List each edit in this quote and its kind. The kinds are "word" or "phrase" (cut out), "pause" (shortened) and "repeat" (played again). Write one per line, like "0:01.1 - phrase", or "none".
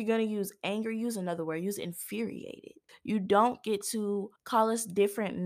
0:02.9 - pause
0:04.4 - pause

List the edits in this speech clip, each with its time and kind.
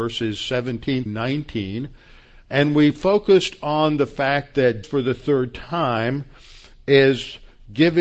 0:01.1 - word
0:04.8 - word

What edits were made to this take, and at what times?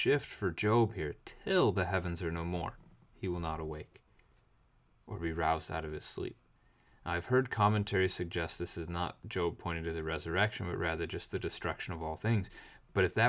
none

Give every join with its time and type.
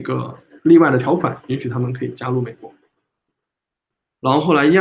none

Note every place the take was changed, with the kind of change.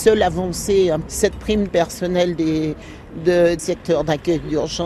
0:01.7 - phrase

